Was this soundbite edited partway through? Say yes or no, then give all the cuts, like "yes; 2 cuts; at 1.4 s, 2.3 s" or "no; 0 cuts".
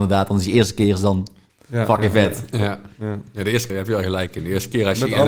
yes; 1 cut; at 3.7 s